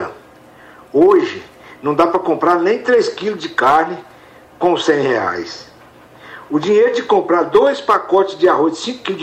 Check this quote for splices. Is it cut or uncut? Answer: uncut